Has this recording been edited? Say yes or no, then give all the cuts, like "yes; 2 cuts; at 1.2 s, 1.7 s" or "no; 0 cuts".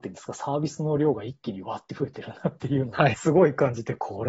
yes; 1 cut; at 3.1 s